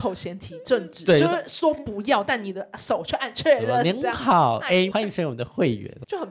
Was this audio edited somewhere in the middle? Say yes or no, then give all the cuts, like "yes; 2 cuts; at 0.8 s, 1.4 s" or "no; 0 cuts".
yes; 1 cut; at 4.9 s